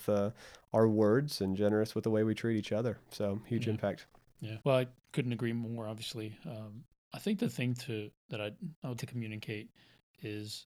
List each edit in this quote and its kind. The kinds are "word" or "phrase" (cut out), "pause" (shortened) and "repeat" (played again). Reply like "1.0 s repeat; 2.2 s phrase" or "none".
4.6 s pause; 8.2 s pause; 9.0 s word